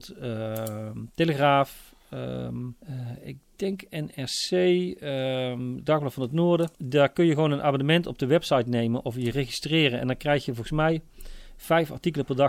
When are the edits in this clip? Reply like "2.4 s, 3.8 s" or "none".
2.8 s, 6.7 s

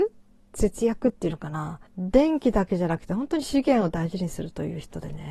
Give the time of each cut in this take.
1.9 s

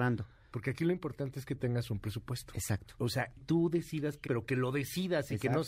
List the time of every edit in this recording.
3.4 s, 4.3 s

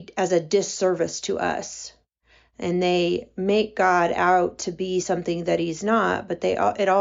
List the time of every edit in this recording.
none

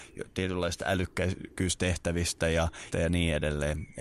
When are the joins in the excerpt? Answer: 2.9 s

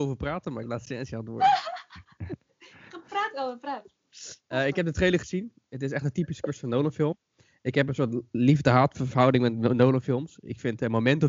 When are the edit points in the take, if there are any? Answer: none

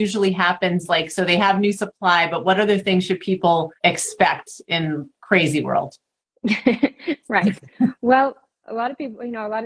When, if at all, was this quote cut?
3.8 s, 6.2 s

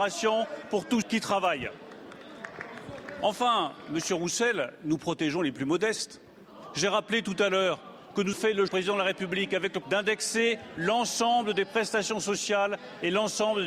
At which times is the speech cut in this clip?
1.0 s, 8.3 s, 8.7 s, 9.8 s

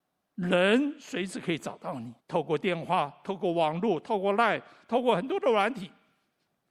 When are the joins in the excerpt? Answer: 2.2 s

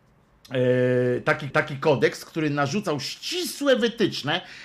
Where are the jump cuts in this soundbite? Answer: 1.5 s

